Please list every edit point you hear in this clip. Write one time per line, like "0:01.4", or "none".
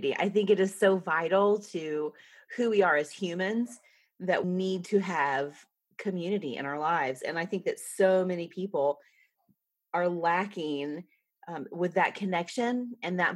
0:04.4